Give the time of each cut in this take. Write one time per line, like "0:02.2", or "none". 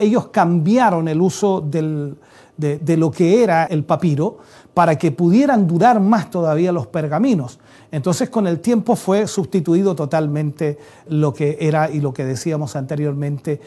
0:02.8
0:03.7
0:11.1

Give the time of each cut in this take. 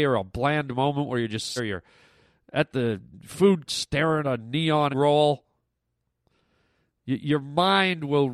0:01.6
0:03.7
0:04.2
0:04.9

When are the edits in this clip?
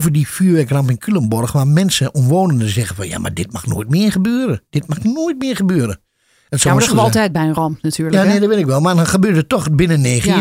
0:06.9

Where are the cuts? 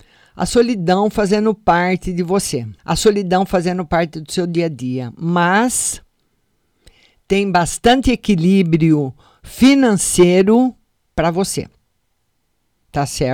0:02.8

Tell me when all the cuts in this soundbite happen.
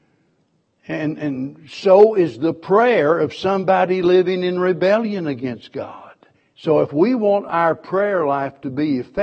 0:06.3

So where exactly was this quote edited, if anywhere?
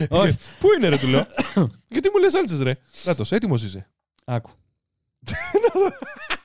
none

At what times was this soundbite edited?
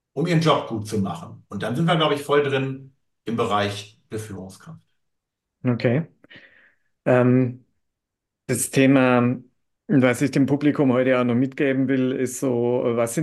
none

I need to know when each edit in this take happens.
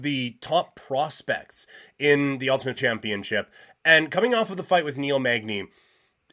0:02.8

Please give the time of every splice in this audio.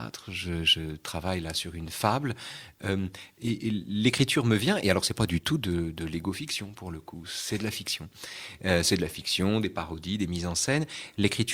none

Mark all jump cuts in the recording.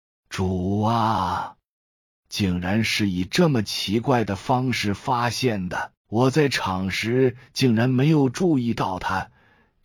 0:06.0

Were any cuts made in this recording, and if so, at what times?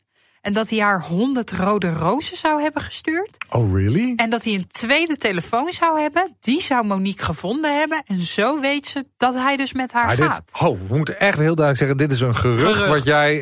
0:11.4

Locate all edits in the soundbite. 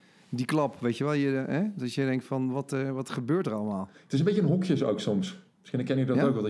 none

